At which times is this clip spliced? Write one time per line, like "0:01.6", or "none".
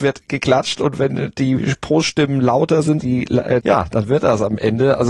0:03.0
0:03.6